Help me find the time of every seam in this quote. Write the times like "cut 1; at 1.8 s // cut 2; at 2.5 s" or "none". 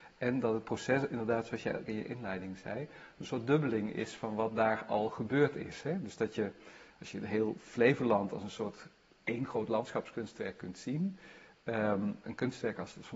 none